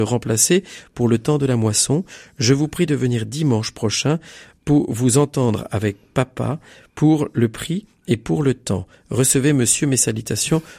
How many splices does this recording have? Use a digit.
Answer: 0